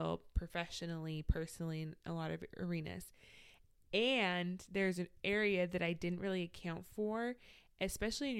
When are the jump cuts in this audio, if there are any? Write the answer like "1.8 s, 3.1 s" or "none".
none